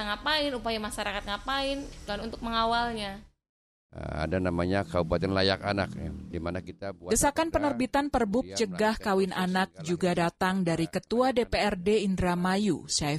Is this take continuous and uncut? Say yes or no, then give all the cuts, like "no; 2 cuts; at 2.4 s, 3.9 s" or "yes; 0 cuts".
no; 1 cut; at 2.1 s